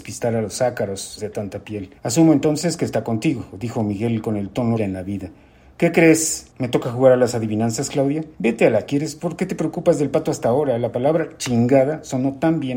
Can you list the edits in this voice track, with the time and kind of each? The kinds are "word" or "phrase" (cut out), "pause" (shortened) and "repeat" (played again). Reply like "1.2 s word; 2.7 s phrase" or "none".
1.2 s word; 2.0 s pause; 4.8 s phrase; 6.5 s pause; 8.3 s pause; 8.9 s word